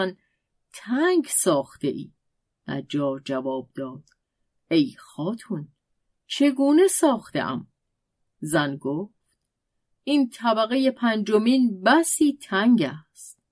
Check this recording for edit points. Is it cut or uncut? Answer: uncut